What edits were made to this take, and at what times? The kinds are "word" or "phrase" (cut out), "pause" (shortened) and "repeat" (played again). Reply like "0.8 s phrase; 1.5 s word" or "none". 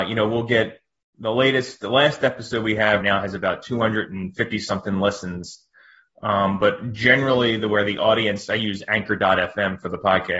3.0 s word